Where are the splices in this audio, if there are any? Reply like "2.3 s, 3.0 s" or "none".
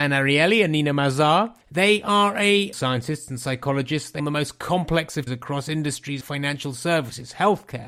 1.6 s, 2.7 s, 4.2 s, 5.3 s, 6.2 s